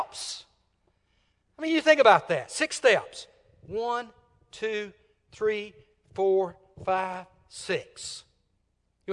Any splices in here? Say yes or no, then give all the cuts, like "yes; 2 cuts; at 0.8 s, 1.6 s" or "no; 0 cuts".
no; 0 cuts